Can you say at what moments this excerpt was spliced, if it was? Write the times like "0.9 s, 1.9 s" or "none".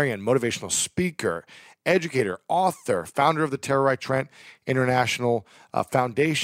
none